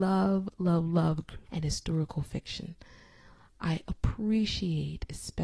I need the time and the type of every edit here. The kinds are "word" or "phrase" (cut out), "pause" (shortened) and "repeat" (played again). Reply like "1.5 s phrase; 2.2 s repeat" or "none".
1.5 s word